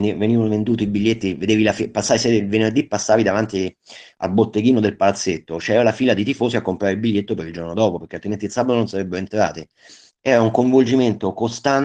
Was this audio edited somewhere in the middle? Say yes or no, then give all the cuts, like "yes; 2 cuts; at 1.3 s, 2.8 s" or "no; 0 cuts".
no; 0 cuts